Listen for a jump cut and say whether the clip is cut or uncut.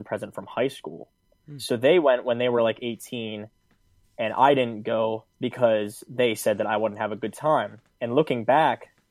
uncut